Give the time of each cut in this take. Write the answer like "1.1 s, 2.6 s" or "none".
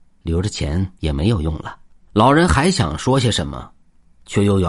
1.0 s, 2.0 s